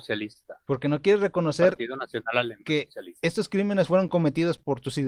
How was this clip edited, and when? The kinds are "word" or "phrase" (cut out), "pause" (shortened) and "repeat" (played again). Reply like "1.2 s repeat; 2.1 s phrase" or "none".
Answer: none